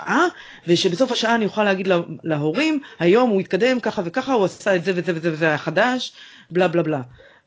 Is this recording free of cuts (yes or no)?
yes